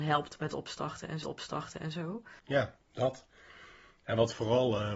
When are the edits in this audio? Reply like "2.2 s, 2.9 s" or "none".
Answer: 1.2 s, 2.8 s